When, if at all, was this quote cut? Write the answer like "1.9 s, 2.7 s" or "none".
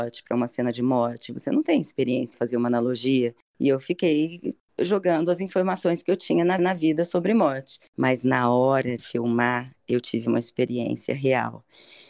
2.3 s, 6.6 s, 9.0 s